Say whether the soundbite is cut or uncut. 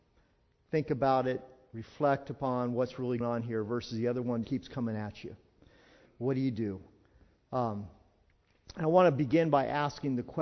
cut